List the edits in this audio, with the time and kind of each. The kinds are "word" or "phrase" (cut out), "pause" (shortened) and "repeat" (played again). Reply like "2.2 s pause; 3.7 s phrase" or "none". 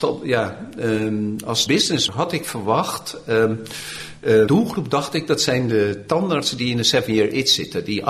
1.7 s word; 2.1 s word; 4.5 s word